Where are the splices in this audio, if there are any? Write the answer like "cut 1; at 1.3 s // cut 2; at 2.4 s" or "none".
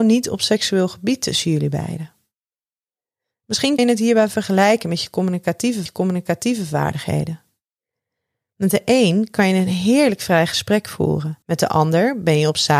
cut 1; at 3.8 s // cut 2; at 5.9 s // cut 3; at 11.4 s